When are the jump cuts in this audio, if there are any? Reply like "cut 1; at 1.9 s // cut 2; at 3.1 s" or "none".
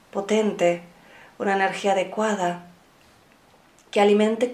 none